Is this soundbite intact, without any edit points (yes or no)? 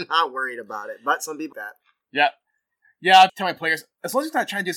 no